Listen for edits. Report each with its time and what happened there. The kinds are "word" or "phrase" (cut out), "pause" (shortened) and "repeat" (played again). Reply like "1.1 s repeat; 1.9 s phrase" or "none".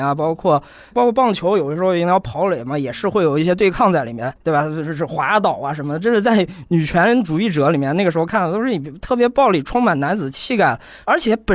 4.4 s pause